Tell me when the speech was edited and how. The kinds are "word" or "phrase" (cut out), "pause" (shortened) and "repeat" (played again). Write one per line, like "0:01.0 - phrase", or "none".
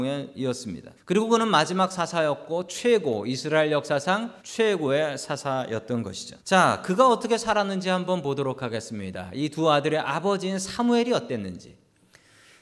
0:01.0 - pause
0:04.4 - pause
0:06.4 - pause